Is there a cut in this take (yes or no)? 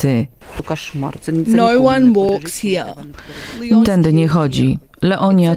yes